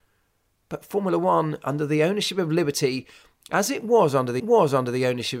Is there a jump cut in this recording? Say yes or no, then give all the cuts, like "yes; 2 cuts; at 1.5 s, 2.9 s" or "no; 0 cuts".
yes; 1 cut; at 4.4 s